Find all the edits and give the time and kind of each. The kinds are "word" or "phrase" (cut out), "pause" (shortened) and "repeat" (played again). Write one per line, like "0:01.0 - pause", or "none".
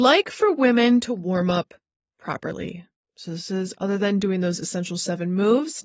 none